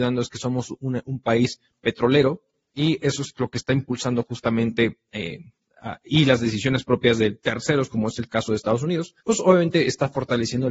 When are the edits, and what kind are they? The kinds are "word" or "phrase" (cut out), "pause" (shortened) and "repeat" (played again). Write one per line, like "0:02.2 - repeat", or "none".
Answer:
0:09.2 - pause